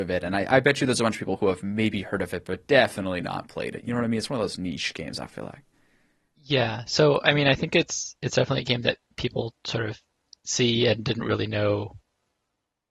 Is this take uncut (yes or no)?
yes